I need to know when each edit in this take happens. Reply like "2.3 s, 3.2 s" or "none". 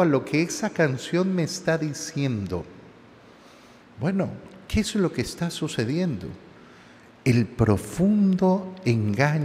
none